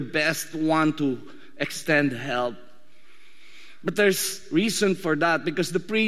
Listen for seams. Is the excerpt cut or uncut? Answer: uncut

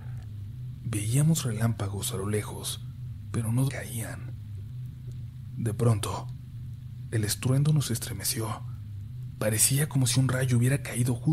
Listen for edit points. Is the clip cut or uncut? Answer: cut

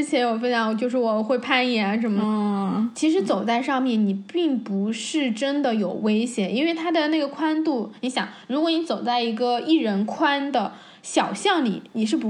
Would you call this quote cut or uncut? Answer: uncut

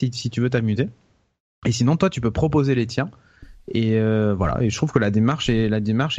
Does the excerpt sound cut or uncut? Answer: uncut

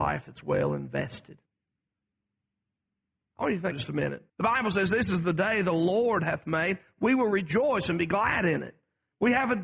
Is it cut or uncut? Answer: cut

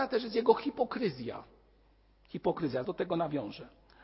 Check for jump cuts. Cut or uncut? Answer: cut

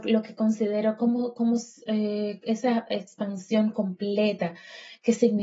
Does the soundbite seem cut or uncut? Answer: uncut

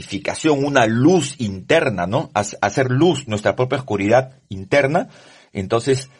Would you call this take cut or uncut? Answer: uncut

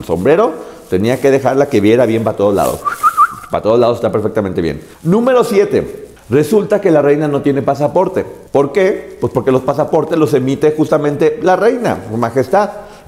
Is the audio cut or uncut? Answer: cut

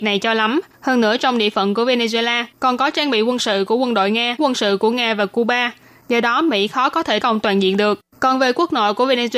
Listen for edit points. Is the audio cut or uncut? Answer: cut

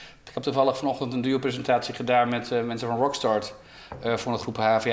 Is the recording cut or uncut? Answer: uncut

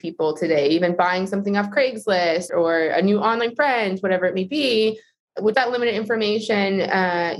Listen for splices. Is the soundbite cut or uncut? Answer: cut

